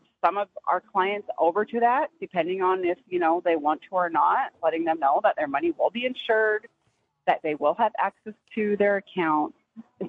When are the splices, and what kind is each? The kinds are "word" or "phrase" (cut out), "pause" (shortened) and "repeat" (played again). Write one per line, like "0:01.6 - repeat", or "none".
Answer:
0:07.1 - word